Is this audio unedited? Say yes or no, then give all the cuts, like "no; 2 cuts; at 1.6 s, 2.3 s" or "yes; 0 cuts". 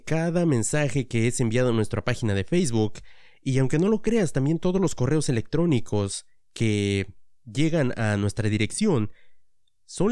yes; 0 cuts